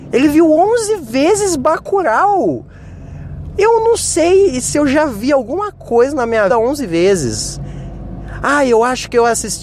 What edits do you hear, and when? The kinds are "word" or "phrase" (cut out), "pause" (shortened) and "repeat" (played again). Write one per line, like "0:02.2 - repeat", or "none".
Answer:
0:06.5 - word